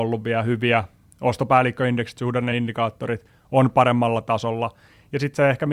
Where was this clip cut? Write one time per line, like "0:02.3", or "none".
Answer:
none

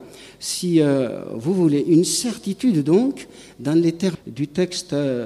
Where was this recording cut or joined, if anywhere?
0:04.1

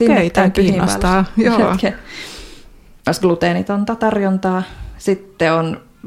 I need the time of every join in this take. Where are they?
none

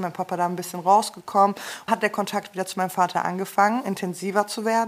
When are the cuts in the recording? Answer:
0:01.9

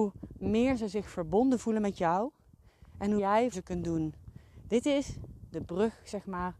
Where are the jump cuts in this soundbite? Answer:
0:03.2
0:03.5

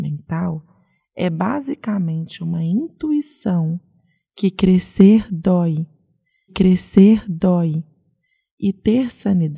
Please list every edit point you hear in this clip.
0:06.5

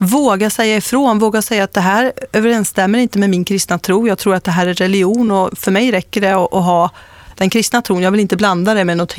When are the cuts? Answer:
none

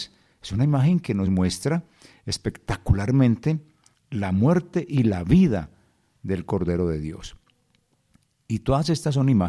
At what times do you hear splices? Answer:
none

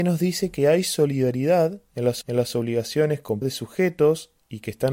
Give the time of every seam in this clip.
0:02.2
0:03.4

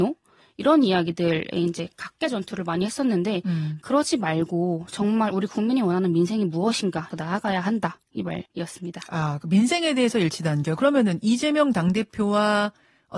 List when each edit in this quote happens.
0:07.1
0:08.5

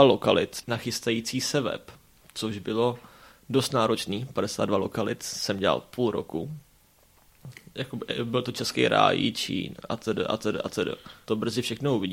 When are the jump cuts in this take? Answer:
none

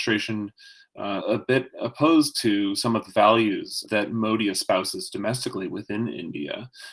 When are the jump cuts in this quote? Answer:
0:01.2
0:03.9

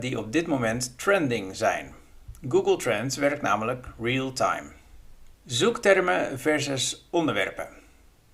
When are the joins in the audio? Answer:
0:05.3

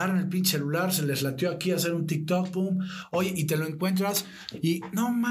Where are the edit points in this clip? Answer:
0:02.5

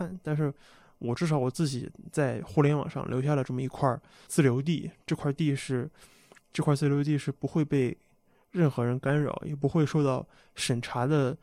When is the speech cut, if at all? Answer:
0:04.3

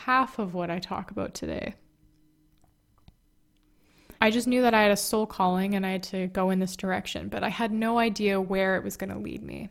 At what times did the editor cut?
0:04.2

